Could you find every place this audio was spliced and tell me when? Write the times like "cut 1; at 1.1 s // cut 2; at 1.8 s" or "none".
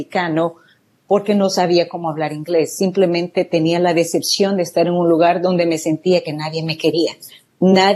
none